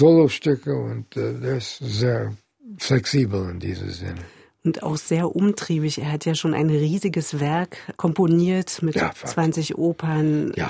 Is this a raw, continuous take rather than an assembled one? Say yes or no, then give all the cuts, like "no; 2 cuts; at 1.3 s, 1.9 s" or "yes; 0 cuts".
yes; 0 cuts